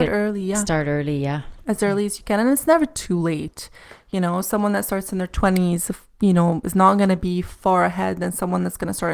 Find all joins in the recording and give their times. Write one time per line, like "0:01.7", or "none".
none